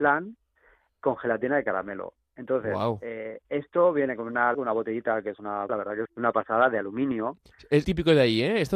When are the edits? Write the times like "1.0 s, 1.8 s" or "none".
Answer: 3.4 s, 4.5 s, 5.7 s, 6.1 s, 7.8 s